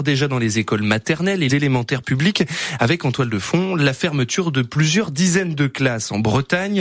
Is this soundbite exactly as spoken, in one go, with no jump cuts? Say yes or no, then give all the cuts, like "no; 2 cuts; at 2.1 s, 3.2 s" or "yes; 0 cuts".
no; 1 cut; at 1.5 s